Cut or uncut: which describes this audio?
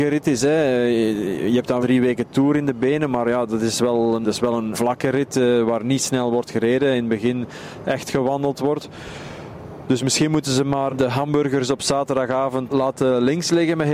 cut